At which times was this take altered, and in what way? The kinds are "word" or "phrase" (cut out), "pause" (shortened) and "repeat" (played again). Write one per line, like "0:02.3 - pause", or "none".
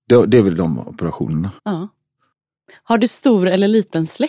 0:01.6 - pause